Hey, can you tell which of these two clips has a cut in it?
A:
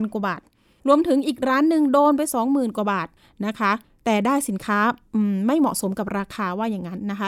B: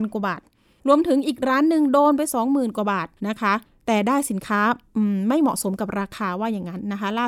B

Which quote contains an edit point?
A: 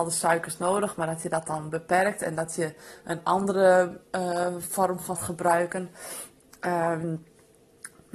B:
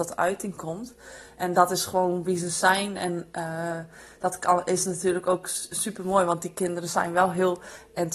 A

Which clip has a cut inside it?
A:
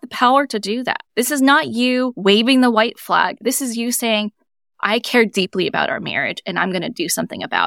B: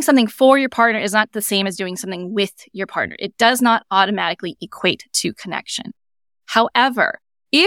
A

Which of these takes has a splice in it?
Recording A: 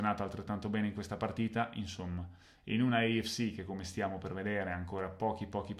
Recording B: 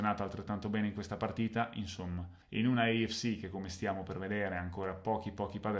B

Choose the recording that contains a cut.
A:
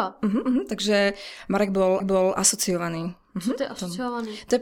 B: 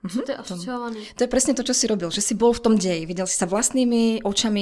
A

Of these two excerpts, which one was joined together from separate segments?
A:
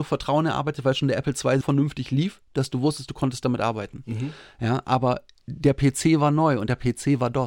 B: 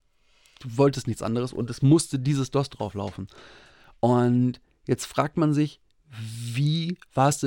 A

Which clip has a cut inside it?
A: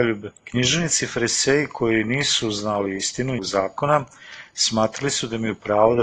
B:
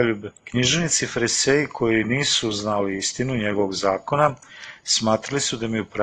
A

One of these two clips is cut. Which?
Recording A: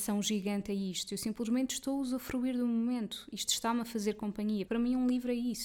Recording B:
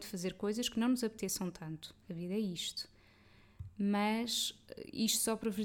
A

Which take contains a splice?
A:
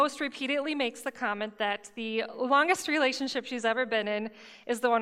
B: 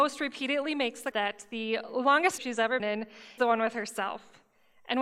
B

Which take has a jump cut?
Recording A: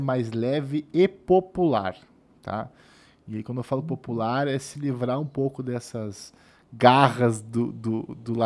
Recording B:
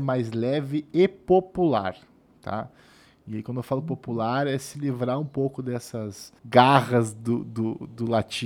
B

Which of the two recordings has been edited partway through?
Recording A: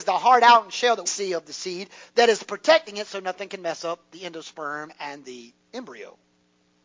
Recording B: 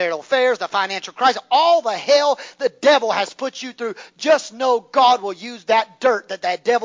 A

